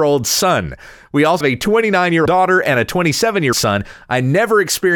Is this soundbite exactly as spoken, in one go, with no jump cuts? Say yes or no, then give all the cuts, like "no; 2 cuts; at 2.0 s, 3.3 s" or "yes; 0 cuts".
no; 3 cuts; at 1.4 s, 2.3 s, 3.5 s